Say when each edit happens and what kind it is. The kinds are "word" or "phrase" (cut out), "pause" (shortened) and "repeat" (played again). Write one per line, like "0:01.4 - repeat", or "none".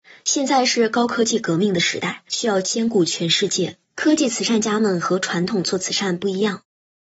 0:02.3 - pause
0:03.8 - pause